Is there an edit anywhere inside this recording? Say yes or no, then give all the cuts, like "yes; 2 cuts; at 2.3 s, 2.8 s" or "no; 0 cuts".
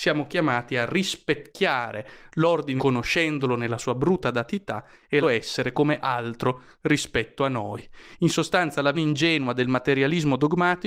yes; 3 cuts; at 2.8 s, 5.2 s, 8.9 s